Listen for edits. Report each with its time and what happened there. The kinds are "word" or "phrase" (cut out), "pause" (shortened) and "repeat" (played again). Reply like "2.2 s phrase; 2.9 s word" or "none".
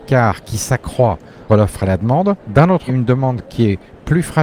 1.5 s word; 2.4 s pause; 2.9 s word